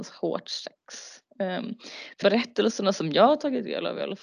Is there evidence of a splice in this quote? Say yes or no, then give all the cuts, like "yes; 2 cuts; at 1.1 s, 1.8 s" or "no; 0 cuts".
yes; 1 cut; at 2.2 s